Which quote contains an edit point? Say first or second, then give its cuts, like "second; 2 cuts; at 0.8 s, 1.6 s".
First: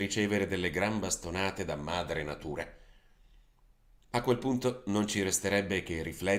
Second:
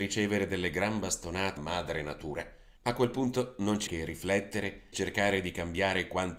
second; 4 cuts; at 1.6 s, 2.8 s, 3.9 s, 4.9 s